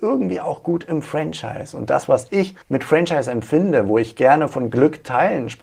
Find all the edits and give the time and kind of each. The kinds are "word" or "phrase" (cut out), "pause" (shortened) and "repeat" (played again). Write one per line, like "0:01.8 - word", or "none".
0:02.6 - pause